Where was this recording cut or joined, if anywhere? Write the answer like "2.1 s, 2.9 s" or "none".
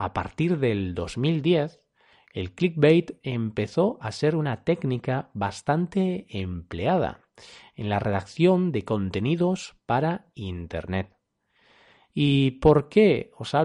none